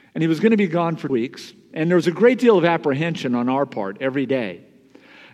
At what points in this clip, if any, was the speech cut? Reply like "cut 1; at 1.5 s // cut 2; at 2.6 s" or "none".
cut 1; at 1.1 s